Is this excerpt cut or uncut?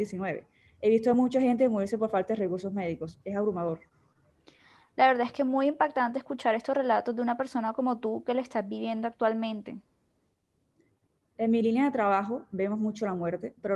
uncut